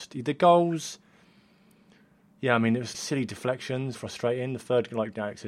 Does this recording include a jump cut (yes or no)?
yes